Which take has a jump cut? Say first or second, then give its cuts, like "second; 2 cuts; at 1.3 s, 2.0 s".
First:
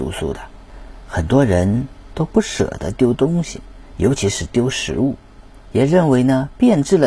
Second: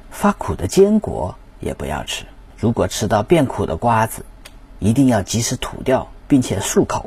second; 1 cut; at 2.5 s